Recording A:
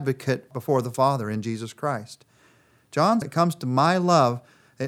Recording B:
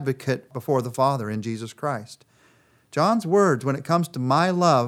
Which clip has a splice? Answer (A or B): A